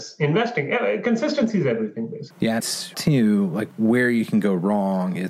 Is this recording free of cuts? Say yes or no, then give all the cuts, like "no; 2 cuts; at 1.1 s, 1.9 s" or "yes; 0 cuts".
no; 2 cuts; at 2.6 s, 2.9 s